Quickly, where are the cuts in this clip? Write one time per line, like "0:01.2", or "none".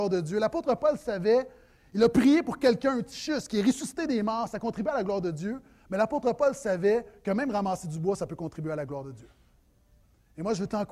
none